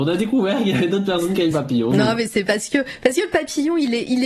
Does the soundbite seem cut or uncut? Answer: cut